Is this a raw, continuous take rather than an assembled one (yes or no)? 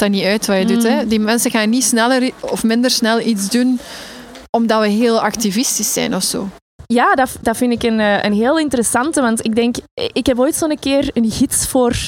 no